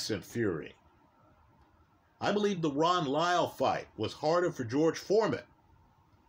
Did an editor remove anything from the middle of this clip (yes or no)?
no